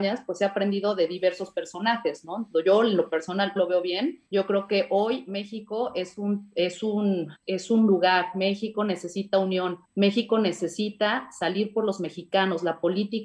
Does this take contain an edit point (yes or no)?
yes